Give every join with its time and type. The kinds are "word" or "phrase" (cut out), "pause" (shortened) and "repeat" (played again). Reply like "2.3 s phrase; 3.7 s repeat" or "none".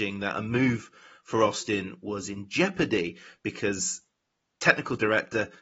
none